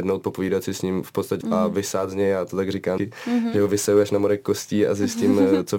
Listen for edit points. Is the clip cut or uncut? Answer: cut